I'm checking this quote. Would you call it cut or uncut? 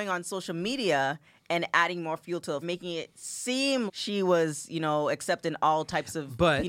cut